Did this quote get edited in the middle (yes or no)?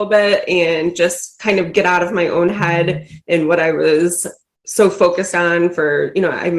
no